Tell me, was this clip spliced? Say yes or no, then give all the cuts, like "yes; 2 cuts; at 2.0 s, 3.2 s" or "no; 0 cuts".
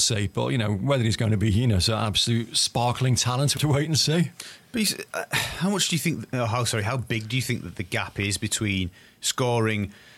yes; 1 cut; at 3.6 s